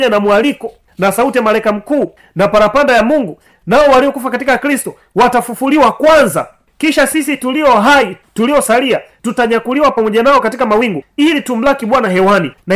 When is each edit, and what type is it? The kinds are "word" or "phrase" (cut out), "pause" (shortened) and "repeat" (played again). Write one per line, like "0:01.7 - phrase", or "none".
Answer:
none